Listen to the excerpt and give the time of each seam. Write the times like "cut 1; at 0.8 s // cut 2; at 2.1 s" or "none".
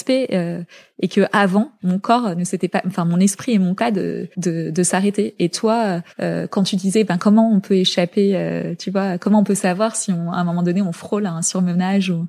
cut 1; at 3.8 s // cut 2; at 4.3 s // cut 3; at 6.1 s